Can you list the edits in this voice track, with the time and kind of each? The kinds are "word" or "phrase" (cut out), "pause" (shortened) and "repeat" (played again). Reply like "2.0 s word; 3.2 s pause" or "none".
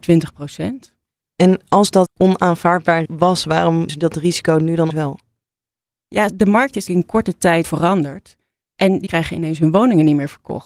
2.1 s word; 3.0 s word; 3.9 s word; 4.9 s word; 6.3 s word; 6.9 s word; 7.6 s word; 9.1 s word